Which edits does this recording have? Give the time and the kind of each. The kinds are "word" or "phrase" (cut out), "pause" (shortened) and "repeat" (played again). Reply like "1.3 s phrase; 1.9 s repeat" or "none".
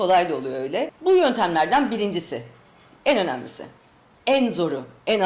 none